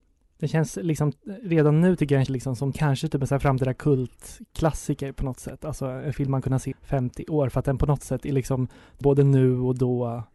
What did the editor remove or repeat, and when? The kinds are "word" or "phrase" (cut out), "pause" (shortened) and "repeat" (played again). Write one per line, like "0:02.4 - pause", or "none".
0:02.3 - word
0:02.7 - word
0:06.4 - word
0:06.7 - word
0:09.0 - word